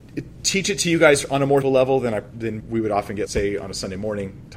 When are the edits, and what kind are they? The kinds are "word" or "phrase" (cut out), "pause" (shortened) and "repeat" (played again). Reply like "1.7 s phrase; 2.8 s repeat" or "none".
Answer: 1.6 s word; 2.6 s word; 3.3 s word